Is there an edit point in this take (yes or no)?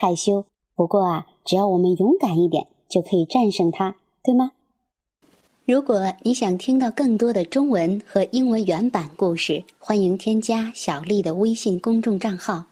no